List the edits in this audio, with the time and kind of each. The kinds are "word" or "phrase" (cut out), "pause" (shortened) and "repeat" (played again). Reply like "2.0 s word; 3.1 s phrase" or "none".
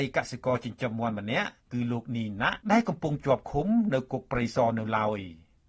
1.6 s pause; 2.6 s pause

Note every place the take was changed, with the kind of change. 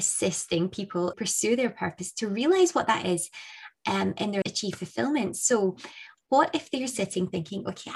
1.1 s phrase; 4.4 s phrase

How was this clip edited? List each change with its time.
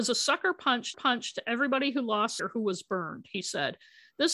0.9 s repeat; 2.4 s word

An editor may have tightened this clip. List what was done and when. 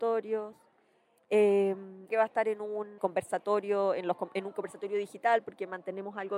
2.1 s phrase; 3.0 s word

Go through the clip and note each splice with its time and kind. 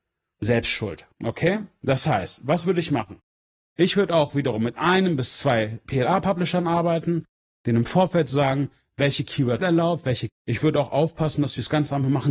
1.1 s pause; 9.6 s word; 10.3 s phrase

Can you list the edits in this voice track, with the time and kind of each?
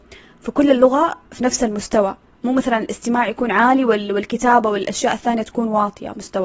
none

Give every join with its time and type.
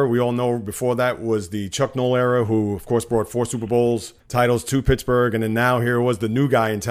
4.2 s pause

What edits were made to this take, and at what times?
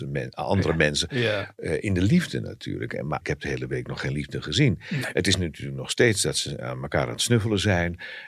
3.2 s word

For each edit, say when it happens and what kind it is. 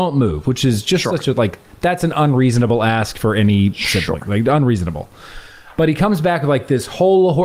none

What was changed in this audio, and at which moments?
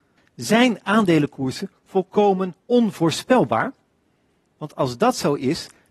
2.6 s pause

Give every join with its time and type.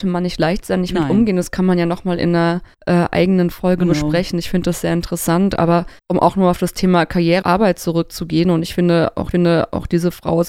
2.7 s pause; 6.0 s pause; 7.4 s word; 9.3 s repeat

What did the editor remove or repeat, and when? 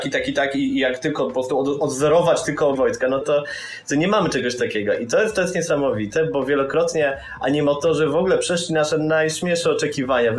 2.8 s word; 3.2 s word

